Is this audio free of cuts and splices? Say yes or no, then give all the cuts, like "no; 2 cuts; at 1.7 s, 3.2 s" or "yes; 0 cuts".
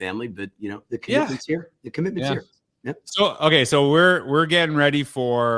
yes; 0 cuts